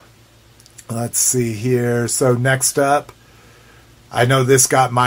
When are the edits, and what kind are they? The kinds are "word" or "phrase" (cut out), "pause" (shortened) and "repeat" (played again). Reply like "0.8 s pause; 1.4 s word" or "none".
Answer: none